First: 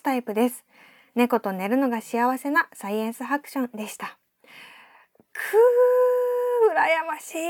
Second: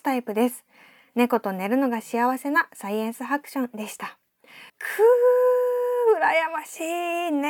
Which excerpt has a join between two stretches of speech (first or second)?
second